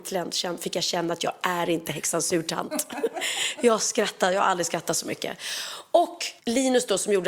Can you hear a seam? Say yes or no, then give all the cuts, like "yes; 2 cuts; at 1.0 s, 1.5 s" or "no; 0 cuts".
yes; 1 cut; at 6.4 s